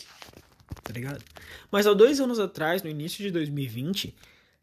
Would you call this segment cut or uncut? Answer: uncut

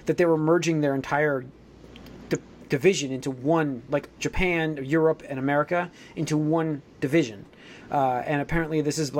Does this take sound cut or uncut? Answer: uncut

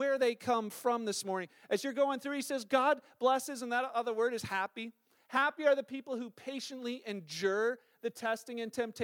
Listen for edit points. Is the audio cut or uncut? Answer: uncut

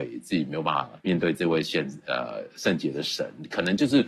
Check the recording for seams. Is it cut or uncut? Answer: cut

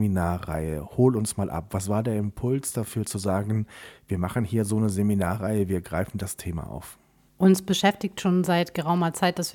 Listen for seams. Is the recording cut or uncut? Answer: uncut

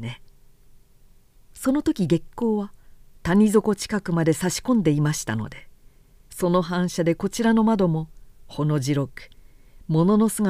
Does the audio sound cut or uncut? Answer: uncut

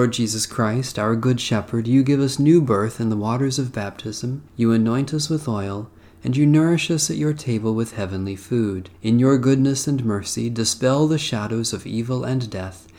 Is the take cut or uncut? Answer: cut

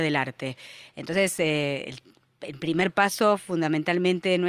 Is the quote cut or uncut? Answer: uncut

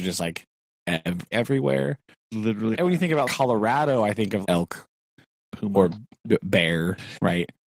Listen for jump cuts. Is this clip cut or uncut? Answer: cut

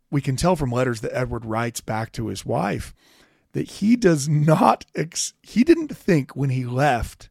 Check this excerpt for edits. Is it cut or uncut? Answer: uncut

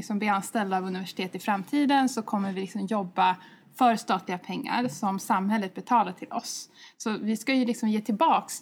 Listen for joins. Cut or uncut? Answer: uncut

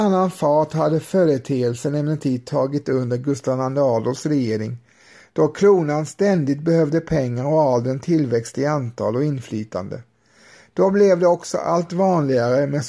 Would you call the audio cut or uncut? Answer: uncut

